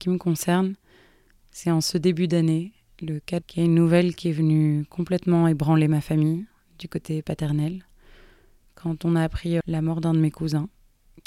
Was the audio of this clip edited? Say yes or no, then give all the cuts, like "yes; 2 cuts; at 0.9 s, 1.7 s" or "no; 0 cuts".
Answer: yes; 2 cuts; at 3.4 s, 9.6 s